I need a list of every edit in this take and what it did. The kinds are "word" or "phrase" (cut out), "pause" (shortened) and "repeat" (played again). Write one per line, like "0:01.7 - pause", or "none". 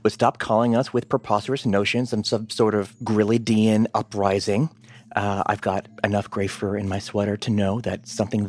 none